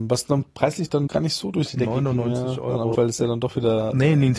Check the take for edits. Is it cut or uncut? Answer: cut